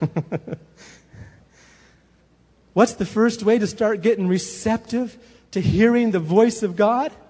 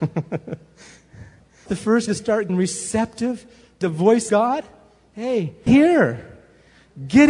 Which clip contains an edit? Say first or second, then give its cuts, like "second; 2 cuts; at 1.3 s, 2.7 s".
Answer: second; 6 cuts; at 1.7 s, 2.1 s, 2.5 s, 3.8 s, 4.3 s, 5.7 s